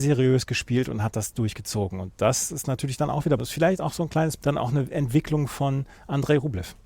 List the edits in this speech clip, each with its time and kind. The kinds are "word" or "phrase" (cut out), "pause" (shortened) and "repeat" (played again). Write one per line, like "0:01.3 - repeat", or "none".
0:03.4 - word
0:04.4 - word